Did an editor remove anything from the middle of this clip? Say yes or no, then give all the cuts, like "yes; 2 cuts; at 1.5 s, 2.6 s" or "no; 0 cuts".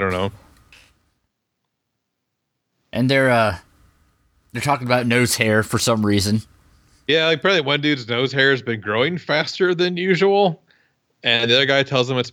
no; 0 cuts